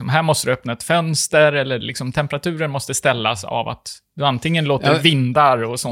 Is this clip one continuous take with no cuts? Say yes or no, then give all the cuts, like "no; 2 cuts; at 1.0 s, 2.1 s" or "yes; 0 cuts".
yes; 0 cuts